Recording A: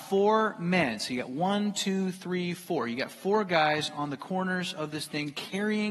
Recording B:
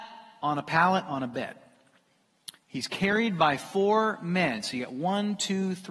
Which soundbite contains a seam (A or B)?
B